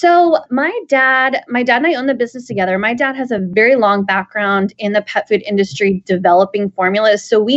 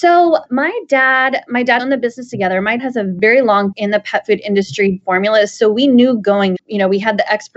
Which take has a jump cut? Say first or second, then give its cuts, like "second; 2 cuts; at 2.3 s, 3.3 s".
second; 5 cuts; at 1.8 s, 2.8 s, 3.7 s, 5.0 s, 6.6 s